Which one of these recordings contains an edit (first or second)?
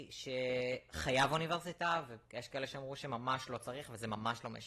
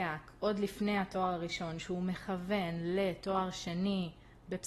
first